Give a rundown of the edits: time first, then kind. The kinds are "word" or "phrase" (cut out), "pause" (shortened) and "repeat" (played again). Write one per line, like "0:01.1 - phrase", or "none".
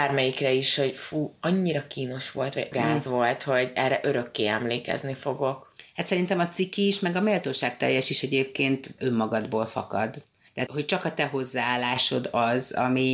0:02.7 - word
0:09.0 - word
0:10.7 - word